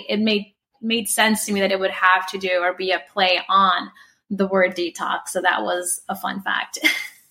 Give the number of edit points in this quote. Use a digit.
0